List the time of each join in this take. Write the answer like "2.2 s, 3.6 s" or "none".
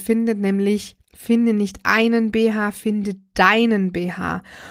1.1 s